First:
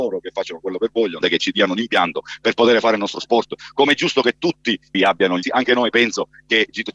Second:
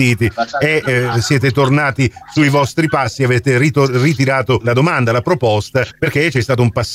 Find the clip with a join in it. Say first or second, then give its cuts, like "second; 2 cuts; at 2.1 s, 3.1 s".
first; 3 cuts; at 1.2 s, 4.9 s, 5.4 s